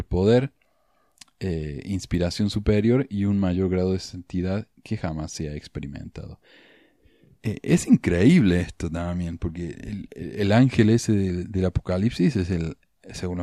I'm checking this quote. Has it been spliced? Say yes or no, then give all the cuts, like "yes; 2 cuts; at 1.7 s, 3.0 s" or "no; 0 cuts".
no; 0 cuts